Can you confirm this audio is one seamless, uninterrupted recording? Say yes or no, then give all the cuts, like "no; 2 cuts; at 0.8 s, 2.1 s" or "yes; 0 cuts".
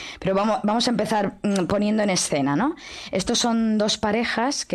yes; 0 cuts